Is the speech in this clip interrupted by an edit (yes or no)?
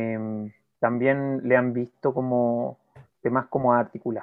no